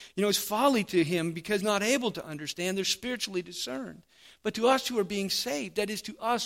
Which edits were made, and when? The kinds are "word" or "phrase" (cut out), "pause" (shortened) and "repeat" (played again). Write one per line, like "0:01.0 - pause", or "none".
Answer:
0:01.6 - word

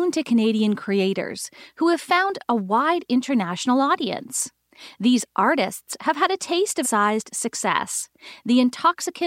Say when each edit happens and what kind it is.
0:06.8 - word

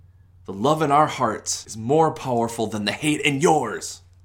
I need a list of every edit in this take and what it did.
none

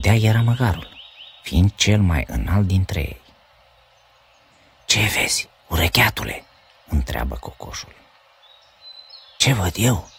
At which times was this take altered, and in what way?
none

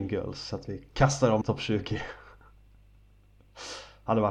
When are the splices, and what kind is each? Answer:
0:01.4 - word

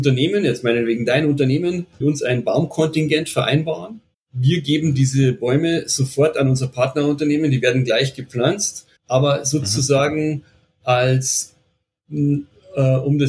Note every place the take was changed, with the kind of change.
0:02.0 - phrase
0:04.1 - pause
0:09.0 - pause

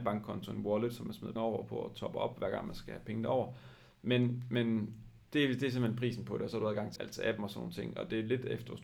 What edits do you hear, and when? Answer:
0:01.4 - word
0:05.2 - pause
0:07.0 - word

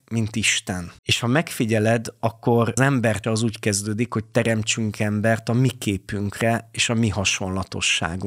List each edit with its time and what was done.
0:01.0 - pause
0:02.8 - word
0:03.2 - word

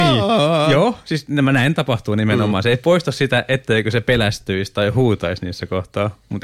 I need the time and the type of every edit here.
none

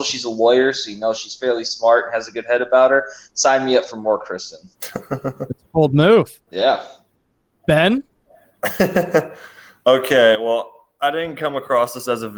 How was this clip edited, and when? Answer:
0:04.7 - pause
0:06.5 - pause

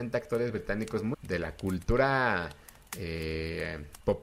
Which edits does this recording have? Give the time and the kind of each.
0:01.1 - phrase

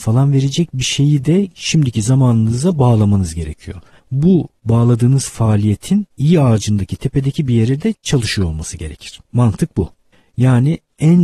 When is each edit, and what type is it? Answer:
0:09.2 - pause

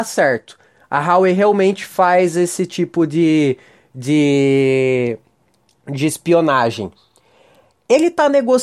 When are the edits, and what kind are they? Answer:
none

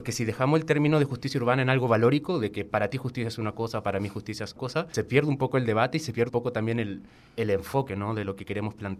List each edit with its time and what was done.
0:04.6 - word
0:04.9 - word
0:06.3 - word

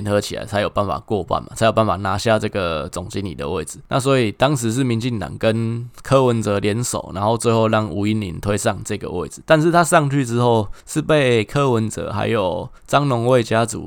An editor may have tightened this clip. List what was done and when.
0:10.8 - pause
0:12.8 - pause

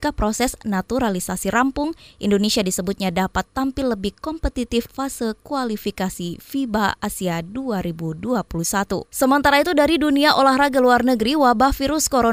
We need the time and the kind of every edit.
0:04.9 - word
0:09.1 - pause

